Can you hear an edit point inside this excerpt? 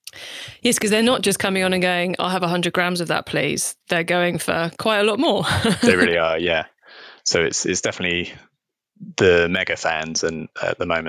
no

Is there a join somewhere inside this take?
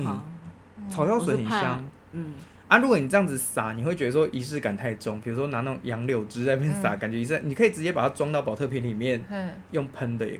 no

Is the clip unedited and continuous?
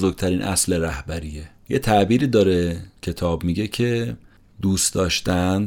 yes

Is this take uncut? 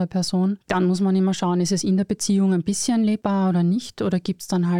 yes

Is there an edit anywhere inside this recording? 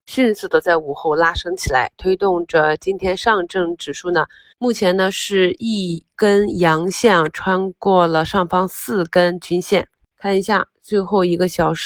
no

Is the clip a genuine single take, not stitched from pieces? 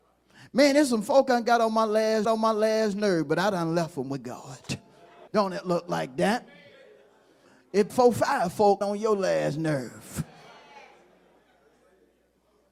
no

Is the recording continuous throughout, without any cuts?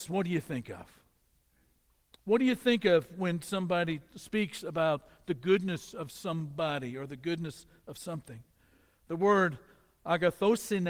yes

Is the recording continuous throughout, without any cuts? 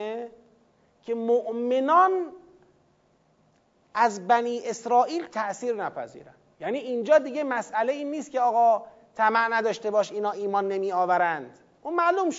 yes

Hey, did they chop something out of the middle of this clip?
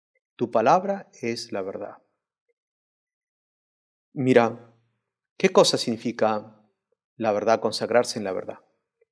no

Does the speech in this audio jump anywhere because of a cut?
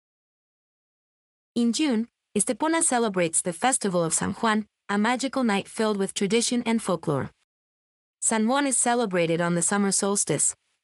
no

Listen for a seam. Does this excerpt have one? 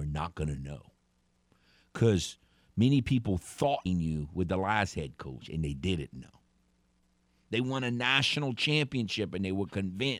yes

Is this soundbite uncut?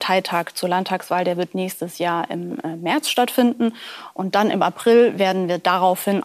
yes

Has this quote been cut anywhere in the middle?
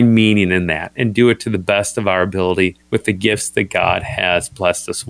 yes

